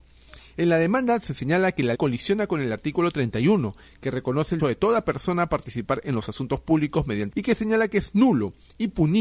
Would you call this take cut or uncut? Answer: cut